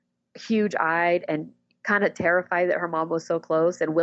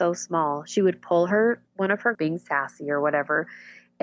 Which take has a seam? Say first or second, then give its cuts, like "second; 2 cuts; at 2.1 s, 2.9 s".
second; 2 cuts; at 1.7 s, 2.1 s